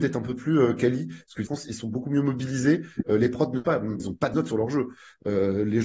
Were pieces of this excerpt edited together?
yes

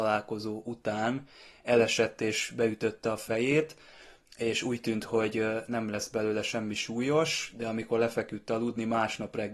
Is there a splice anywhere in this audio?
no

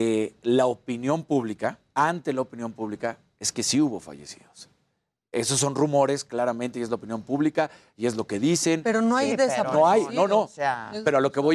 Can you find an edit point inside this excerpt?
no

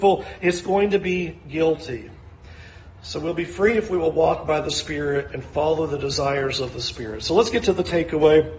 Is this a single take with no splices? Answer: yes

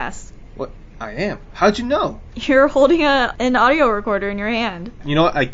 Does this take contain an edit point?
no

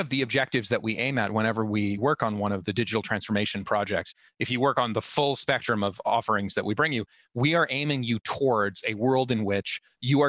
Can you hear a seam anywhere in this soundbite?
no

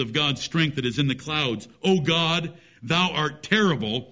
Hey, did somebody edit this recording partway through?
no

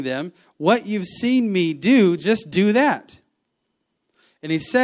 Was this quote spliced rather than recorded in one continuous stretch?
no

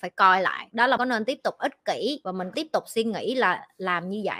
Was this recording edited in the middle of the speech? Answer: yes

